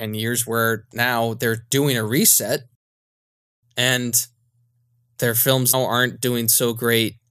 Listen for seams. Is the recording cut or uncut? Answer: cut